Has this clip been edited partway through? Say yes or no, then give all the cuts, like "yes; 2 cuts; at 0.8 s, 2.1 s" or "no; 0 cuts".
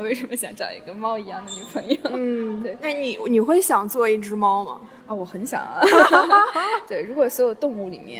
yes; 1 cut; at 5.0 s